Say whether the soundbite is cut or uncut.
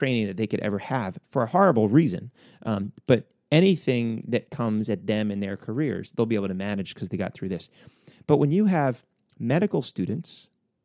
uncut